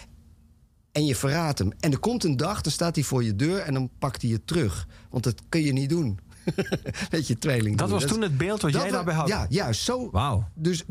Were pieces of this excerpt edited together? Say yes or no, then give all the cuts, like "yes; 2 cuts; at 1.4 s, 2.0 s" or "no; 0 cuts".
no; 0 cuts